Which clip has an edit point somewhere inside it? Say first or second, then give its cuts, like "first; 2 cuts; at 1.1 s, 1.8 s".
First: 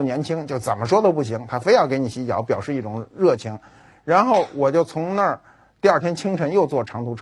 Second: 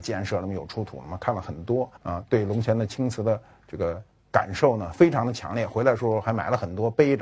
second; 1 cut; at 2.0 s